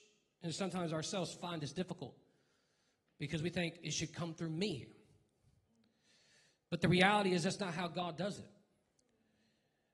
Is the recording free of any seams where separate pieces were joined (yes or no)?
yes